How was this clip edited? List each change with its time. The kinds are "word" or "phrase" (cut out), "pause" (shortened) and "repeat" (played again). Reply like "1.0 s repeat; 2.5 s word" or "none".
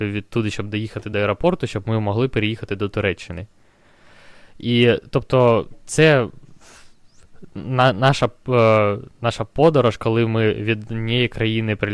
none

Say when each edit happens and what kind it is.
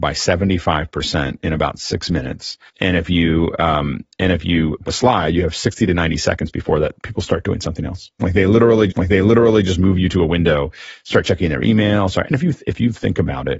2.7 s pause; 4.9 s phrase; 7.0 s word; 8.9 s repeat; 12.2 s word

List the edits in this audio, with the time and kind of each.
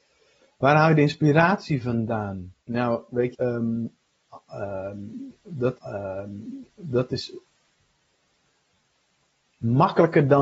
2.6 s pause; 3.3 s word; 5.8 s repeat

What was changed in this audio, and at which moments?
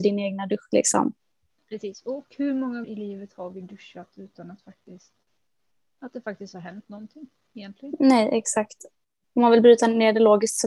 2.8 s word

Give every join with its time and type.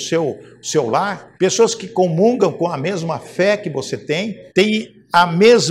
1.3 s pause; 4.5 s pause

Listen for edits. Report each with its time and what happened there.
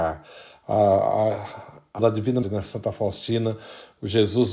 2.0 s word; 2.4 s word

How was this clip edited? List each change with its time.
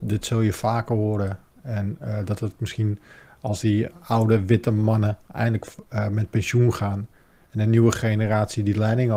none

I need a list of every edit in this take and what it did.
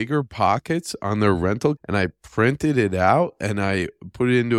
1.8 s word

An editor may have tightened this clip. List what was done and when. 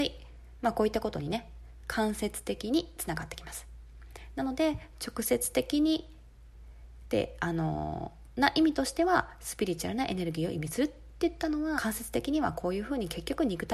11.8 s phrase

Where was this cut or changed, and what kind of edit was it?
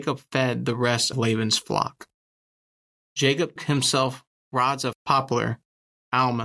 1.1 s word; 3.6 s word; 4.9 s word

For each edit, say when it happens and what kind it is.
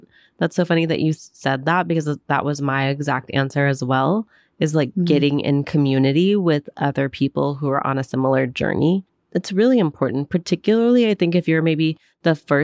9.1 s pause

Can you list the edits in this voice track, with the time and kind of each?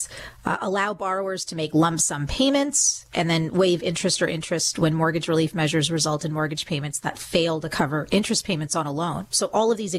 none

